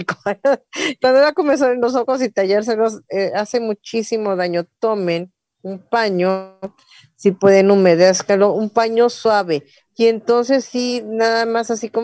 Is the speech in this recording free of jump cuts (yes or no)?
yes